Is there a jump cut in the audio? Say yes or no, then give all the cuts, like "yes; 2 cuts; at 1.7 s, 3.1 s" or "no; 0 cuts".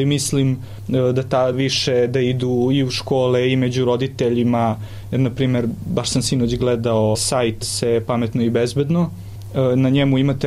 yes; 3 cuts; at 1.5 s, 7.1 s, 7.6 s